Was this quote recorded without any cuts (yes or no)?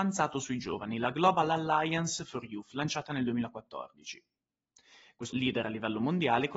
no